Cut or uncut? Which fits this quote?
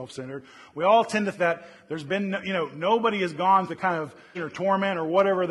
cut